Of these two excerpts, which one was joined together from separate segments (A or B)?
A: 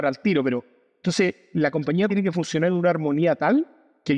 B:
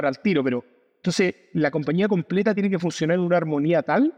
A